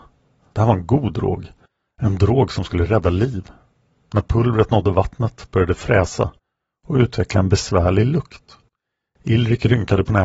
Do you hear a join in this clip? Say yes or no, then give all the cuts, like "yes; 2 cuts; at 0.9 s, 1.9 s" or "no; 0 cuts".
no; 0 cuts